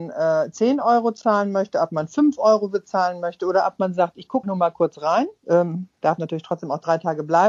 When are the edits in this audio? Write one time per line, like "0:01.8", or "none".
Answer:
0:04.4
0:05.4